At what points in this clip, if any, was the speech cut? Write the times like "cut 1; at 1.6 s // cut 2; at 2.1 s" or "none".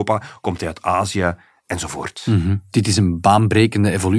none